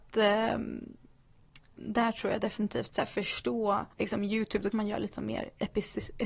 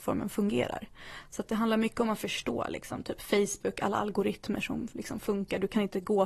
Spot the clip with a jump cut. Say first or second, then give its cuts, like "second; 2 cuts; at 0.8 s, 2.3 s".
first; 4 cuts; at 1.7 s, 2.9 s, 3.9 s, 4.7 s